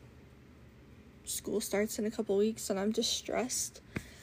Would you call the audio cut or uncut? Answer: uncut